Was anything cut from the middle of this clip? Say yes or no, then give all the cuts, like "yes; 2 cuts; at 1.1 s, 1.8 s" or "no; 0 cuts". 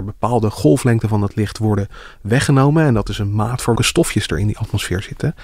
yes; 1 cut; at 3.8 s